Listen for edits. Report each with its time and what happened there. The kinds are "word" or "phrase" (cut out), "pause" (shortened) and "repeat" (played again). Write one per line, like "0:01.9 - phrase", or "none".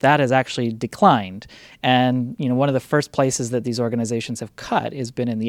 none